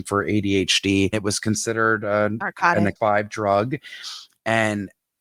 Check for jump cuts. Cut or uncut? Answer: cut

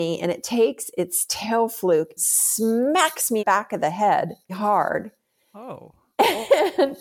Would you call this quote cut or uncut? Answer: cut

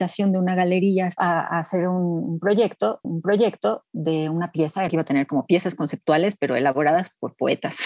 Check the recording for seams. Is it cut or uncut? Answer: cut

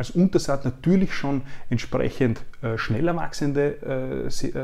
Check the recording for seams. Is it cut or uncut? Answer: uncut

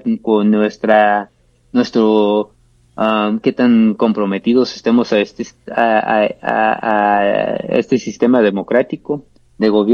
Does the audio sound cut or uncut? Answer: uncut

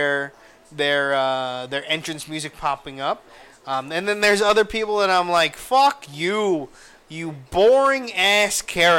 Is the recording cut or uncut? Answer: uncut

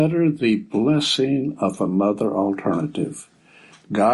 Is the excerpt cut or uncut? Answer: uncut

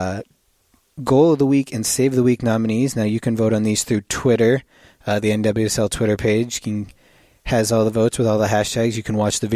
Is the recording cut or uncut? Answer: uncut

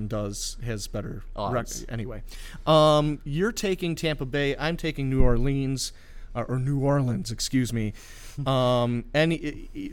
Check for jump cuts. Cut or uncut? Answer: uncut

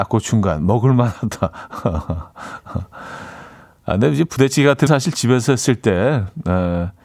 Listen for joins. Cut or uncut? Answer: cut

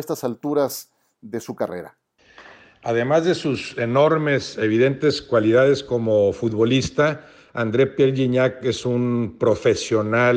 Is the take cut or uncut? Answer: uncut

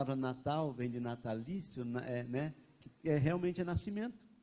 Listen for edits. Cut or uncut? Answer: uncut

